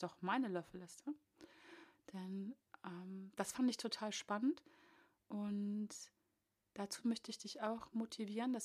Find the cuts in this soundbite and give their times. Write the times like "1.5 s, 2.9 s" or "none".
none